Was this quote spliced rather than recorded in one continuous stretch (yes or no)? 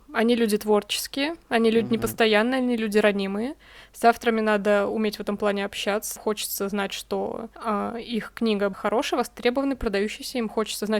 yes